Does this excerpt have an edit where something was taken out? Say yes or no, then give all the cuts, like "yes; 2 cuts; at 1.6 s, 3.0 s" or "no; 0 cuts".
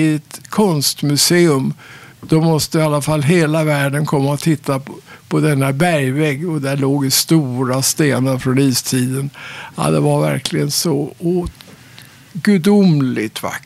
yes; 1 cut; at 2.1 s